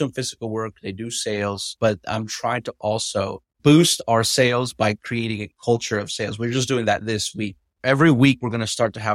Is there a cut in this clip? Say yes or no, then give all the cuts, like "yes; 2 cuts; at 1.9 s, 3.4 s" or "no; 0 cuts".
no; 0 cuts